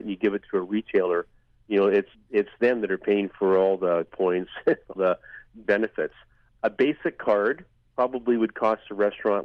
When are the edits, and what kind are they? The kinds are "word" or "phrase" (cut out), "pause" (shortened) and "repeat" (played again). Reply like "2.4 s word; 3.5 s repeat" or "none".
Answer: 2.1 s word; 4.1 s word; 5.0 s word; 5.6 s word